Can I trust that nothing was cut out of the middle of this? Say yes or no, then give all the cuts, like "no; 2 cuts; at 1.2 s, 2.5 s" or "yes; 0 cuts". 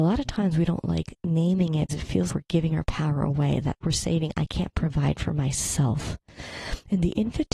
no; 3 cuts; at 1.9 s, 2.3 s, 3.8 s